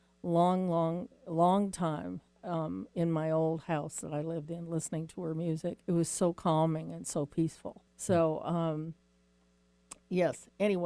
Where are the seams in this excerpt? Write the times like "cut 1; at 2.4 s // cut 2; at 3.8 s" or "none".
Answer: cut 1; at 5.8 s // cut 2; at 7.9 s